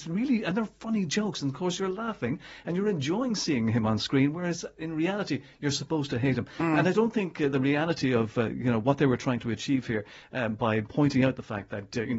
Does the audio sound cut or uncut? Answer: uncut